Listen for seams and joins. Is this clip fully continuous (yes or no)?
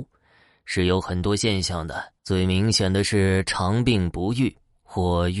no